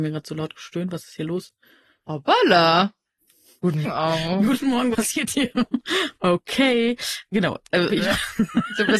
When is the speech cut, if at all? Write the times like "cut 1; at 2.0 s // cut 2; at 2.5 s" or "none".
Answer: cut 1; at 3.8 s // cut 2; at 4.9 s // cut 3; at 7.3 s // cut 4; at 7.9 s